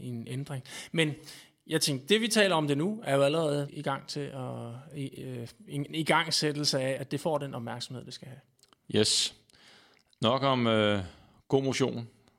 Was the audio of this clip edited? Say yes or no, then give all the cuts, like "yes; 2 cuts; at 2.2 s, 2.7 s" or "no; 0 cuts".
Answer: yes; 2 cuts; at 3.7 s, 7.0 s